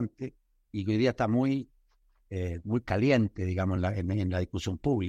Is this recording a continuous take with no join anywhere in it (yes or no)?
yes